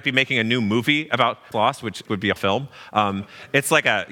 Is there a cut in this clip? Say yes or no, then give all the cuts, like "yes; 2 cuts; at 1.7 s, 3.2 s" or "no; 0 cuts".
yes; 3 cuts; at 1.5 s, 2.1 s, 2.4 s